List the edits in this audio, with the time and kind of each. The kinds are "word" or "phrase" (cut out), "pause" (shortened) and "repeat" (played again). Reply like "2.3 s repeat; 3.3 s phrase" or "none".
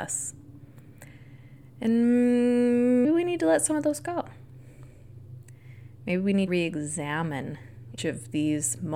3.0 s word; 6.5 s word; 8.0 s word